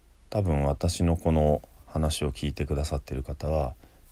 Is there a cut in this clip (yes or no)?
no